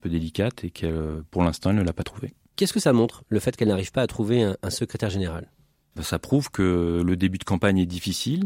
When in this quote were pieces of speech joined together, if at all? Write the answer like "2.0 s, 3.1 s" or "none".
none